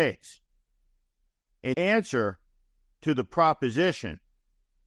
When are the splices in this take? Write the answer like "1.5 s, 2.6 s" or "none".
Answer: 1.7 s